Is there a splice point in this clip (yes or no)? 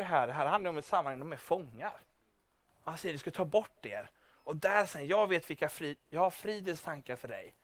no